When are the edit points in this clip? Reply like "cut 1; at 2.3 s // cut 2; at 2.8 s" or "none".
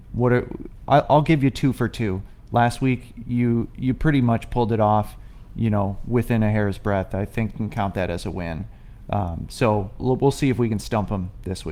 cut 1; at 7.5 s // cut 2; at 10.0 s